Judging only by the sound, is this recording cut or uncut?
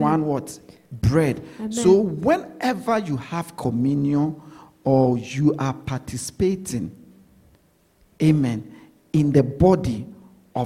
uncut